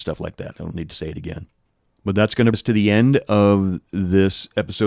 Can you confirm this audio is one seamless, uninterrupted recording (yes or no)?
no